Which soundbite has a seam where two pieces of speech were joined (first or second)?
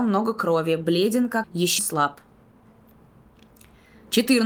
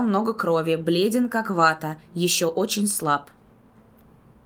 first